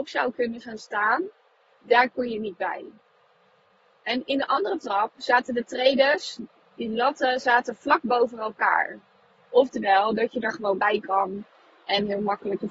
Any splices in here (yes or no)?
no